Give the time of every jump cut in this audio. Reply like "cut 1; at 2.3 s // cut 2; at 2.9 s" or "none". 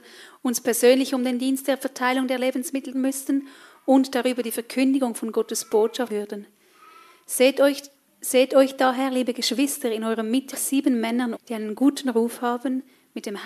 cut 1; at 2.9 s // cut 2; at 6.1 s // cut 3; at 8.1 s // cut 4; at 10.5 s // cut 5; at 11.3 s